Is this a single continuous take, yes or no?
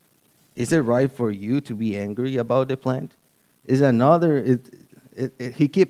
yes